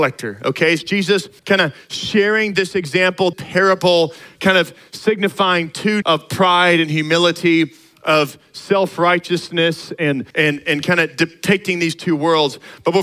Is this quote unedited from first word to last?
no; 4 cuts; at 1.4 s, 3.3 s, 6.0 s, 10.3 s

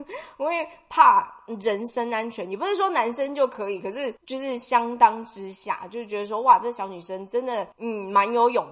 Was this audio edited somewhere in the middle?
yes; 2 cuts; at 4.2 s, 7.7 s

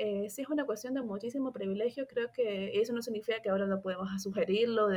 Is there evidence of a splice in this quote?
no; 0 cuts

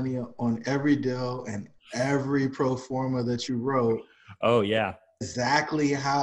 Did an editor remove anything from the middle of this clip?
no; 0 cuts

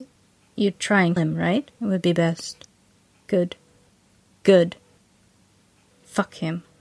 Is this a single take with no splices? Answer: no; 2 cuts; at 1.2 s, 1.7 s

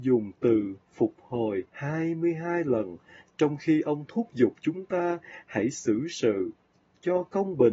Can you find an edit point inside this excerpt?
yes; 1 cut; at 1.7 s

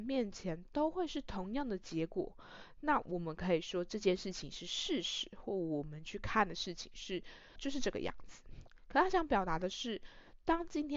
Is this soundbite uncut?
no; 1 cut; at 7.6 s

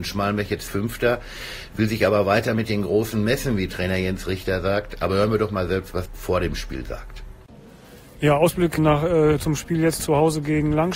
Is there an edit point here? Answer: yes; 3 cuts; at 6.1 s, 8.8 s, 10.0 s

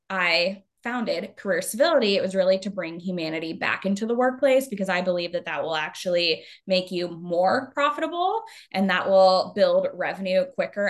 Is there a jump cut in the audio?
no; 0 cuts

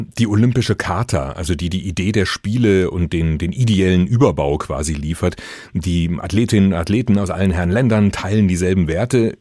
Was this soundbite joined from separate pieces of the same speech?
no; 0 cuts

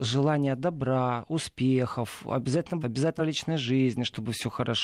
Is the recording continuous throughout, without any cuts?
no; 2 cuts; at 2.8 s, 3.2 s

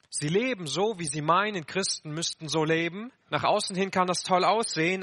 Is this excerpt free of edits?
no; 1 cut; at 3.2 s

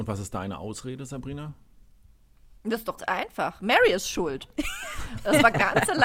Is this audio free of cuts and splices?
no; 1 cut; at 3.0 s

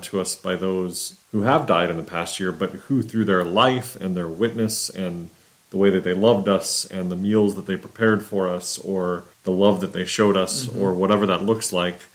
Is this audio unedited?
no; 2 cuts; at 1.2 s, 9.3 s

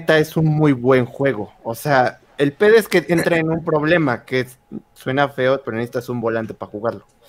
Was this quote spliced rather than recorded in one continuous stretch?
no; 0 cuts

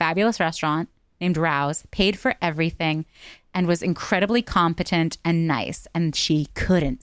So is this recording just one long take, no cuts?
yes; 0 cuts

